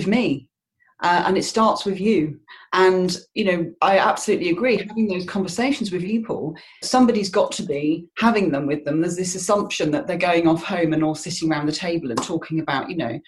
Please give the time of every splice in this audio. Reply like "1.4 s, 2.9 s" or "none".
3.8 s, 6.0 s, 6.8 s